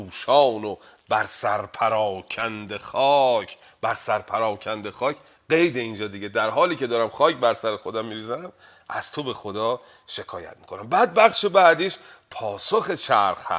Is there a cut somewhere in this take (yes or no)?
no